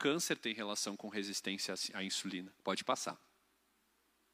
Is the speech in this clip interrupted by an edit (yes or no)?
yes